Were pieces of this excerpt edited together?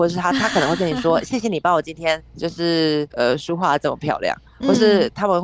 yes; 2 cuts; at 2.3 s, 3.1 s

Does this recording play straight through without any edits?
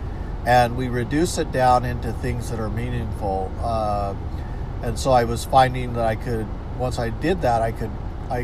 yes; 0 cuts

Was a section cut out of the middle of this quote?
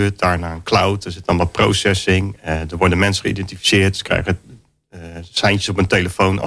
no; 0 cuts

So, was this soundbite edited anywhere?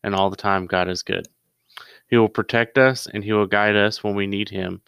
no; 0 cuts

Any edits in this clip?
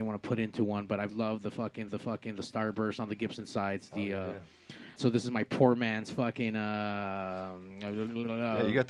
yes; 3 cuts; at 1.1 s, 1.9 s, 5.0 s

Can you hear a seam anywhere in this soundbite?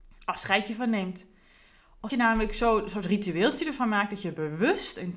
yes; 1 cut; at 2.1 s

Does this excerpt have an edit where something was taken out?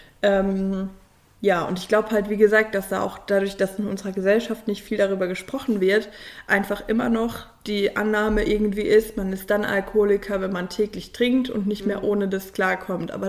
no; 0 cuts

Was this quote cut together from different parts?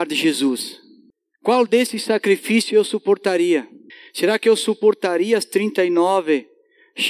no; 0 cuts

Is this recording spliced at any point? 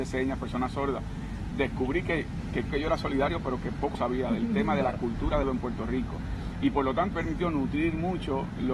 yes; 5 cuts; at 1.5 s, 2.7 s, 3.9 s, 5.4 s, 7.1 s

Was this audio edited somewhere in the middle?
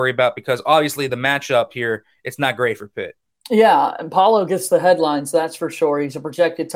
no; 0 cuts

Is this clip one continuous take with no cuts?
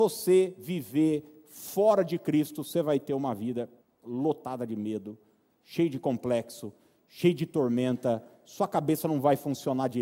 no; 1 cut; at 3.8 s

